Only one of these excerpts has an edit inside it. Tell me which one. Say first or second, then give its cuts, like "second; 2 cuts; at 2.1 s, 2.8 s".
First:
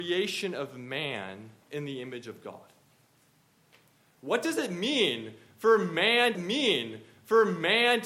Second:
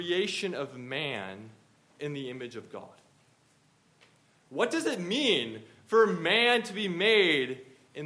first; 2 cuts; at 1.6 s, 6.3 s